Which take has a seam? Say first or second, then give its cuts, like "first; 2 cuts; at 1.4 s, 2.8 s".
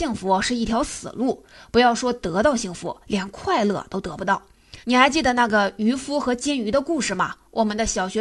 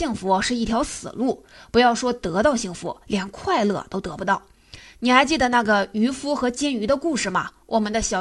first; 1 cut; at 4.8 s